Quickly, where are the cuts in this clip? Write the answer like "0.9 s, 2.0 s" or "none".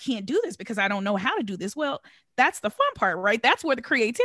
2.6 s